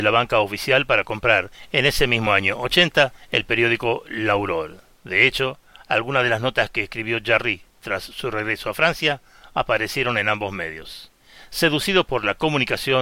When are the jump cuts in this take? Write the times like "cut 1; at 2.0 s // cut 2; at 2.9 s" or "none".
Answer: none